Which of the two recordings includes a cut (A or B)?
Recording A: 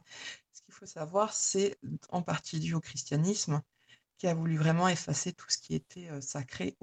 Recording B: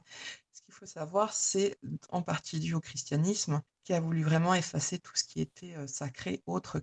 B